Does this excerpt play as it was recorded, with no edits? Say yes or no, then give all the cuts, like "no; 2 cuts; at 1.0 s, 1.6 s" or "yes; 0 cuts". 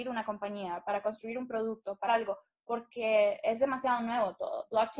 no; 1 cut; at 2.1 s